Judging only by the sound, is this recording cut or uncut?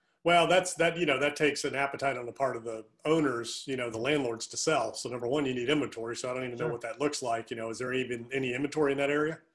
uncut